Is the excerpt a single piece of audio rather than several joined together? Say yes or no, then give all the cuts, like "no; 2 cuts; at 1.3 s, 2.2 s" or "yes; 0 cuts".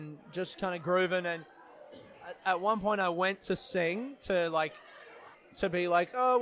no; 1 cut; at 5.3 s